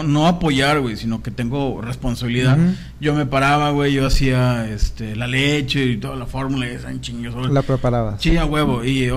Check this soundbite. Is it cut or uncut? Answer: uncut